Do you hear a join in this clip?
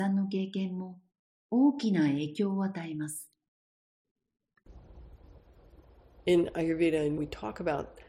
yes; 1 cut; at 7.2 s

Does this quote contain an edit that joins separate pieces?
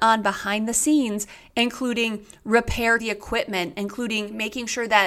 yes; 1 cut; at 3.0 s

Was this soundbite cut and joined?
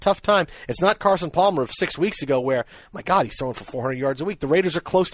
no; 0 cuts

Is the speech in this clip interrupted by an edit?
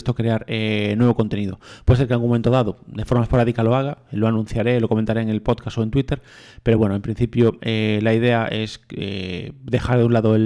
no; 0 cuts

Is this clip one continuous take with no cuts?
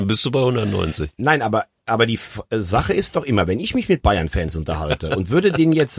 yes; 0 cuts

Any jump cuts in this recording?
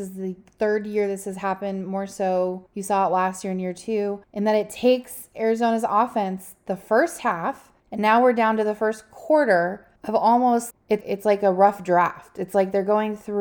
yes; 6 cuts; at 2.7 s, 4.2 s, 7.8 s, 10.0 s, 10.7 s, 11.0 s

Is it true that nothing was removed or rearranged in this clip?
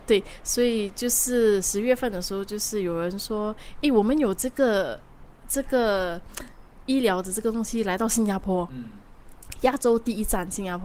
yes; 0 cuts

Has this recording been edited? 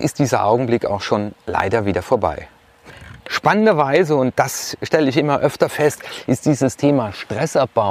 yes; 1 cut; at 3.2 s

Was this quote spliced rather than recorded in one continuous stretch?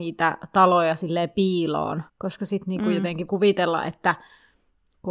yes; 2 cuts; at 2.1 s, 3.3 s

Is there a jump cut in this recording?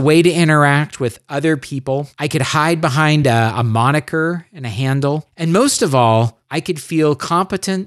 no; 0 cuts

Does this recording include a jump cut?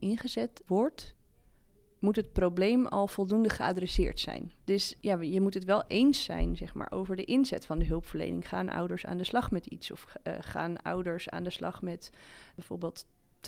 no; 0 cuts

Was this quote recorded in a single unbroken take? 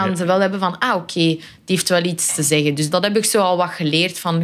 no; 1 cut; at 2.9 s

